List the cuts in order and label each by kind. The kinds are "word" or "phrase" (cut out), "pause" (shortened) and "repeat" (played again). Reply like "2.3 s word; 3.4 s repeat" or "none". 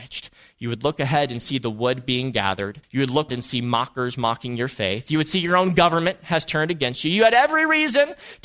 2.8 s pause; 3.3 s word